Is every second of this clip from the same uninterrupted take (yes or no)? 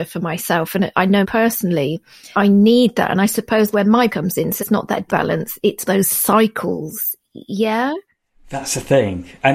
no